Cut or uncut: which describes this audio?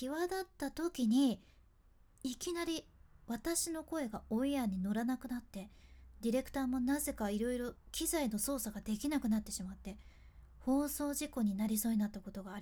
uncut